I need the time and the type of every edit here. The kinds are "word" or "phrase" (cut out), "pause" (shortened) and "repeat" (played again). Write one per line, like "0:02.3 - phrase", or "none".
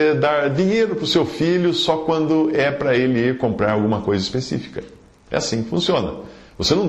none